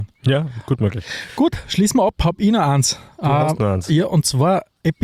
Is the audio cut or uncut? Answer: uncut